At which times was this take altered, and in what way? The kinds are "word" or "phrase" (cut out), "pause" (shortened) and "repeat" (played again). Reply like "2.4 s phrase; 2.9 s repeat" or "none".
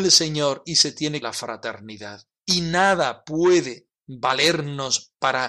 1.2 s phrase; 2.4 s pause; 4.0 s pause